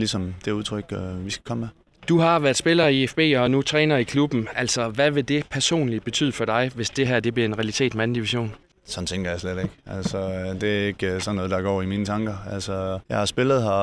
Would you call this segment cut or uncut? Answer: uncut